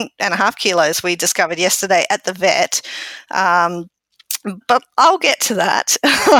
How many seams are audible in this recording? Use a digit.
1